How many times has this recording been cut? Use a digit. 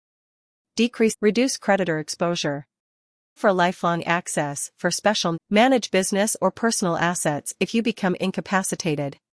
3